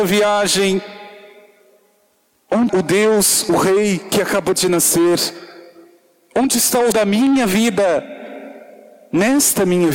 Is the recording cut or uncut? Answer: cut